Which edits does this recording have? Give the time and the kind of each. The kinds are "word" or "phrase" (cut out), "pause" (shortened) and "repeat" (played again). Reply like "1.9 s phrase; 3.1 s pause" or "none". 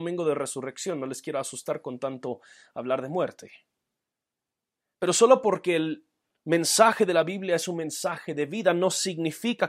none